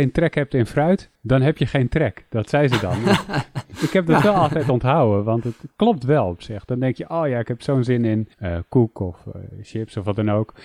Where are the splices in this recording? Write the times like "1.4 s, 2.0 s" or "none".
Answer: 1.1 s, 8.3 s